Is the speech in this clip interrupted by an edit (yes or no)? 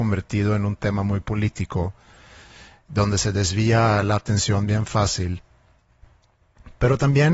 no